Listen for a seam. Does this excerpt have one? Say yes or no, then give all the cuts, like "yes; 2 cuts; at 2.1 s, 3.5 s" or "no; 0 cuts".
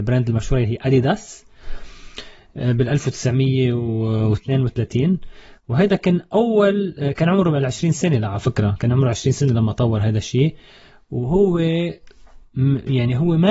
no; 0 cuts